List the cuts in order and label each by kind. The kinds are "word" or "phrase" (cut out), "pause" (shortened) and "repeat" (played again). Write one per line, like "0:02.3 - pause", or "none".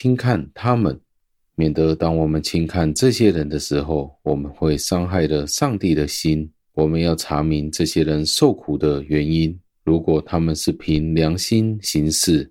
none